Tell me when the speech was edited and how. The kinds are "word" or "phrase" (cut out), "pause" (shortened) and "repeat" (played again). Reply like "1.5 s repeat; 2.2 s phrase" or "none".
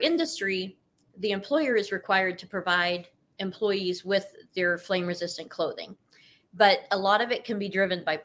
none

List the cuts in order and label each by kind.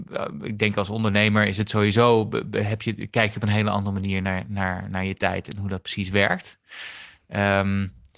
none

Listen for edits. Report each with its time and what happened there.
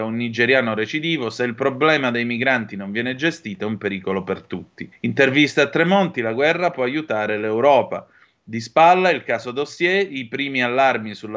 4.9 s pause

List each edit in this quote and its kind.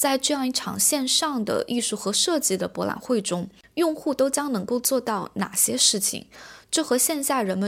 none

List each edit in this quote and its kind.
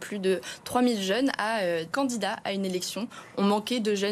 1.9 s word

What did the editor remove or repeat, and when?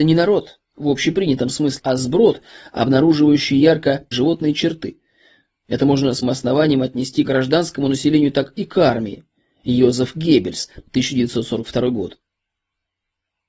1.8 s word; 4.1 s word; 6.2 s word; 7.2 s word

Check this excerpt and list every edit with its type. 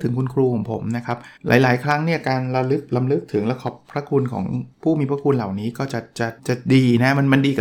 1.4 s pause; 4.7 s pause; 6.4 s pause

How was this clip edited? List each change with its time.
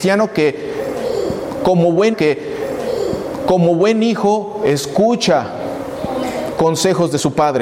2.1 s repeat; 6.5 s word

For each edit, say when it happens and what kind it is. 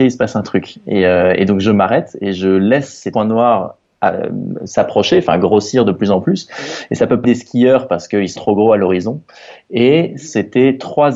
3.1 s word; 7.2 s word; 8.4 s word

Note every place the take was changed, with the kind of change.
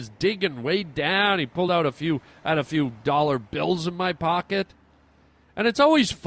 none

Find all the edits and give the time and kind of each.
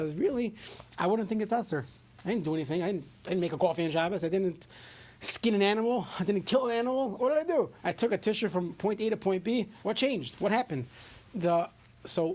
9.8 s pause; 11.3 s pause

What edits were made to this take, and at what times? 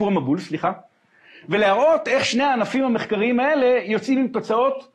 none

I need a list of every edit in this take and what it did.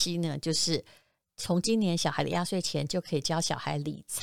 none

